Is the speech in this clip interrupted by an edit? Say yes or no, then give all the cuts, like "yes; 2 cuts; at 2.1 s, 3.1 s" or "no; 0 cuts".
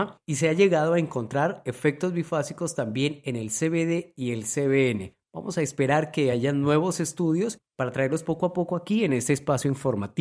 no; 0 cuts